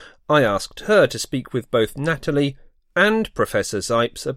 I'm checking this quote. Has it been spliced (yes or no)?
no